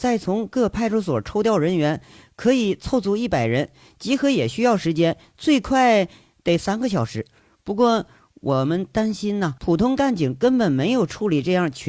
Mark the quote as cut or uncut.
cut